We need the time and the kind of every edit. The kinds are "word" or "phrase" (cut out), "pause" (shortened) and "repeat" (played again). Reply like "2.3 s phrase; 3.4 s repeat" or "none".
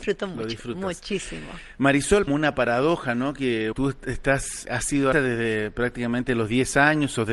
2.3 s phrase; 3.7 s word; 4.6 s word; 5.1 s word